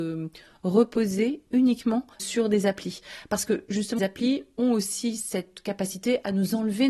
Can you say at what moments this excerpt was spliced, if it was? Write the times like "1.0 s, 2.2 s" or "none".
2.1 s, 4.0 s